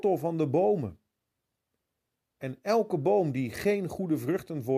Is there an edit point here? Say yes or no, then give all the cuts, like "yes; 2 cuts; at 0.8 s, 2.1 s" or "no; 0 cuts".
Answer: no; 0 cuts